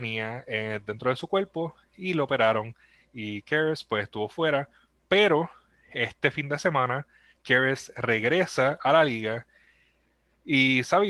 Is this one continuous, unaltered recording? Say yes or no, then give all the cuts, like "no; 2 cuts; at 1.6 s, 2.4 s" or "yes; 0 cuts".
yes; 0 cuts